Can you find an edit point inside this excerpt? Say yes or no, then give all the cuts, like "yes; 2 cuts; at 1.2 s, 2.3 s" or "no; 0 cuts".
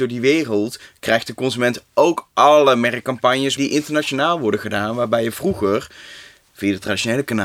yes; 1 cut; at 3.6 s